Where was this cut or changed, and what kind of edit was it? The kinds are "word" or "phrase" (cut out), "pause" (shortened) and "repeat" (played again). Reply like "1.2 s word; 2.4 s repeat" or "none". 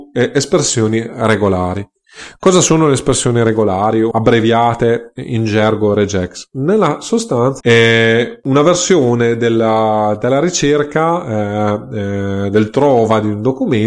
4.1 s word; 7.6 s word